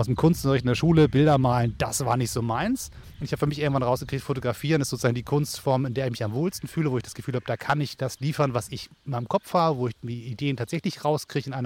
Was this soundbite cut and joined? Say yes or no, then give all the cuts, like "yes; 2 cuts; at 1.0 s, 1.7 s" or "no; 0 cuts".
no; 0 cuts